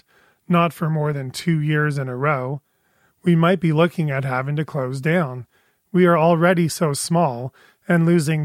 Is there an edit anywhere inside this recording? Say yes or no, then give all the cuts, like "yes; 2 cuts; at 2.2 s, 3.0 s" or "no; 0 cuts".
no; 0 cuts